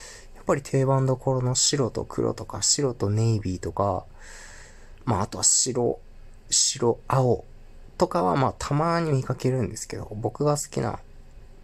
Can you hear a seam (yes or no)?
yes